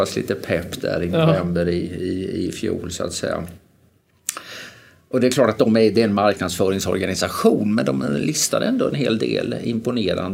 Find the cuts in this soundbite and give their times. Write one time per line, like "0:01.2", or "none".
none